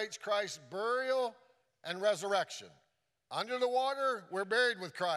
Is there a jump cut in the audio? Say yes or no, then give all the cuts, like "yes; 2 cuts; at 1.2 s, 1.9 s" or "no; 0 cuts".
no; 0 cuts